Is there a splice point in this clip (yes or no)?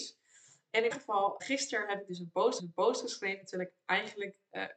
yes